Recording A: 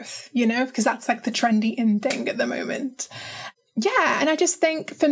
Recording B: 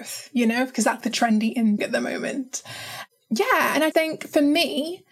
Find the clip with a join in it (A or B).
B